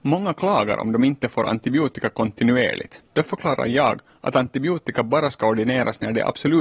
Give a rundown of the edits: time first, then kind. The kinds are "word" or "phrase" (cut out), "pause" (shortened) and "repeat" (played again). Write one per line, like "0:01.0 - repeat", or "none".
0:03.1 - pause